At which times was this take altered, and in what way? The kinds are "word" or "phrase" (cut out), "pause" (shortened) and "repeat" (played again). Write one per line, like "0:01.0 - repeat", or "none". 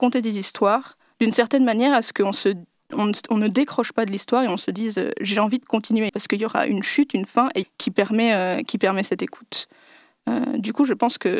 0:06.1 - word
0:07.6 - phrase